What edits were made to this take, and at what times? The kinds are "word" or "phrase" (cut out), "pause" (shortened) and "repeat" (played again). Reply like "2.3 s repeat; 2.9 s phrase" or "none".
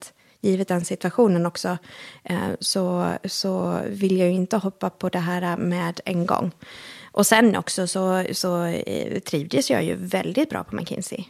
none